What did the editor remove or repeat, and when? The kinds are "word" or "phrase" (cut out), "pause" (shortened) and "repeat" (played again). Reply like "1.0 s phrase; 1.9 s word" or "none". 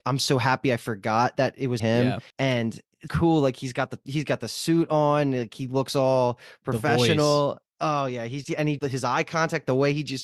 1.8 s word; 2.3 s pause; 3.1 s word; 8.4 s word; 8.8 s word